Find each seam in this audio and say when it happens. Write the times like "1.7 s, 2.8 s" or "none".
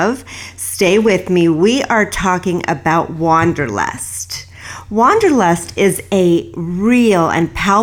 none